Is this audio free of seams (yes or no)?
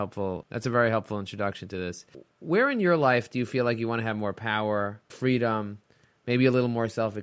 no